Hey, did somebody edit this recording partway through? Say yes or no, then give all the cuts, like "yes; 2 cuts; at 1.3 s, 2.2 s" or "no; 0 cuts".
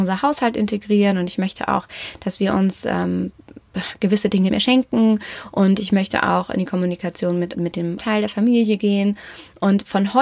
yes; 3 cuts; at 4.5 s, 7.5 s, 8.0 s